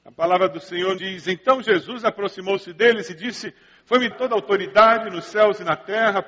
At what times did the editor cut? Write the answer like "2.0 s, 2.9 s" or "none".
1.0 s, 4.1 s